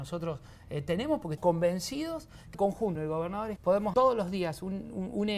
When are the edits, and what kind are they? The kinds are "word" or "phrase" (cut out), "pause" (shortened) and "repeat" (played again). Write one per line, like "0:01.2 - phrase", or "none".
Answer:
0:01.4 - word
0:02.5 - word
0:03.0 - word
0:03.6 - word
0:03.9 - word